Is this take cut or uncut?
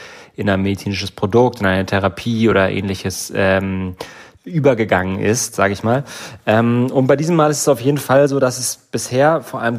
uncut